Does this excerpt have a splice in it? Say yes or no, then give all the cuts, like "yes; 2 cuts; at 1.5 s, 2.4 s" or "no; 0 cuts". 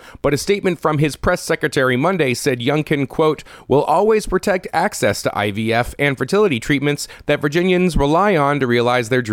no; 0 cuts